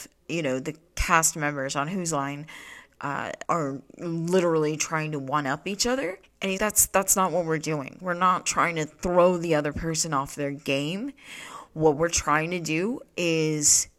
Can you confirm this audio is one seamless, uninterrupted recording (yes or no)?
no